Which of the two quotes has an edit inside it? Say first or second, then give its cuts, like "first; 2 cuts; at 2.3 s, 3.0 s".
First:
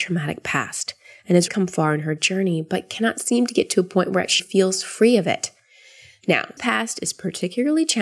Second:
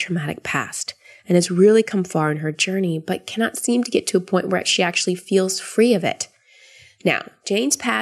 first; 3 cuts; at 1.5 s, 4.4 s, 6.6 s